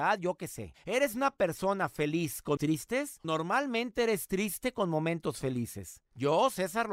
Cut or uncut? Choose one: cut